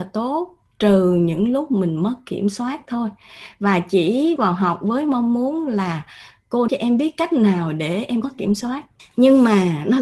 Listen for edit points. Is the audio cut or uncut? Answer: cut